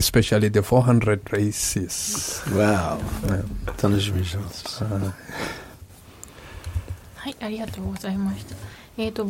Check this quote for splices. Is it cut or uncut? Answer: cut